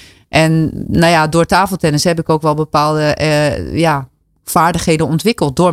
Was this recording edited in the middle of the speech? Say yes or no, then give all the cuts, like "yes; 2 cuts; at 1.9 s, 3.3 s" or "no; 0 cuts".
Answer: no; 0 cuts